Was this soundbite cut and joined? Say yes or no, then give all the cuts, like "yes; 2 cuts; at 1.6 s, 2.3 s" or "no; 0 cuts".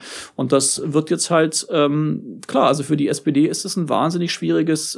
no; 0 cuts